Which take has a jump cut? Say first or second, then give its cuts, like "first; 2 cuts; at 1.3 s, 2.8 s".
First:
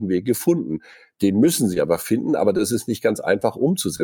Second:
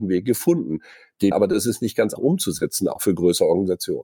second; 2 cuts; at 1.3 s, 2.2 s